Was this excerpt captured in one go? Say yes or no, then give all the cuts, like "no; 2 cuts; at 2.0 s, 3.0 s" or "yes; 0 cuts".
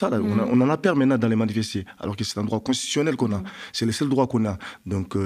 yes; 0 cuts